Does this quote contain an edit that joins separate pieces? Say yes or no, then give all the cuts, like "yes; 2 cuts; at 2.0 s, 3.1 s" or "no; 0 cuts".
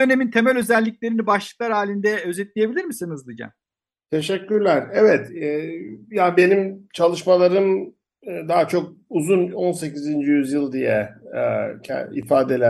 no; 0 cuts